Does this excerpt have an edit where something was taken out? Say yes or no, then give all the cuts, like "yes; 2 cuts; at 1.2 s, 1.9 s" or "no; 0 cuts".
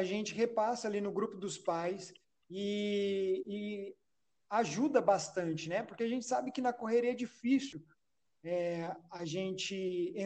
no; 0 cuts